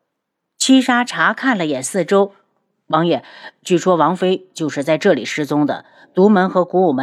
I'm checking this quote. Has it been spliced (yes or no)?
no